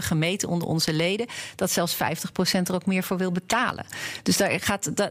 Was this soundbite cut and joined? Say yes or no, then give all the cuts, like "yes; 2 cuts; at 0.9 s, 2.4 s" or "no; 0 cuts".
no; 0 cuts